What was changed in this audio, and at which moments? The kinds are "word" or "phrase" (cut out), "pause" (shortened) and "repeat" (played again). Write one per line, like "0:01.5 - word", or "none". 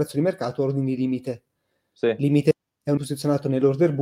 0:03.0 - word